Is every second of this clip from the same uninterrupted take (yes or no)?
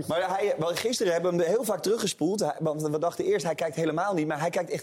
yes